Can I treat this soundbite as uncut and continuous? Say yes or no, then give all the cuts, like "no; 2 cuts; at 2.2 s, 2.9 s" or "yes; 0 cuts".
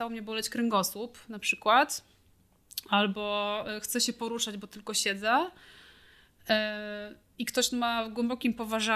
yes; 0 cuts